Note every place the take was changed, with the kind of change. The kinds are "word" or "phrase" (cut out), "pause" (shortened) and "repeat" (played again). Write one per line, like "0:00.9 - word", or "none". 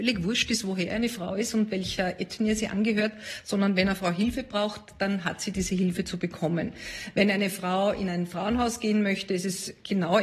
none